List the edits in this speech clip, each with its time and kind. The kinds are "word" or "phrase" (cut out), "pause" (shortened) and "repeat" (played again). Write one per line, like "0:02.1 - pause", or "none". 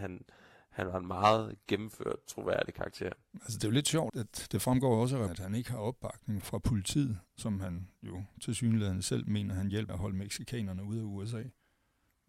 0:04.1 - word
0:05.3 - word
0:06.4 - word
0:09.9 - word